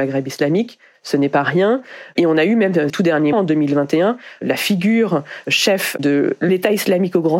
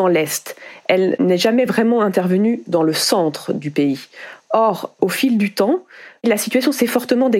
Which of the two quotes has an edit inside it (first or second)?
first